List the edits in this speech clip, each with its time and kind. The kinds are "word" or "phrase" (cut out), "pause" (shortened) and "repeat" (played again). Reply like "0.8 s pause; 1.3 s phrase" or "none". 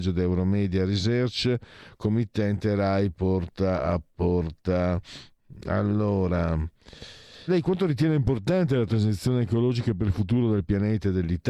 7.5 s word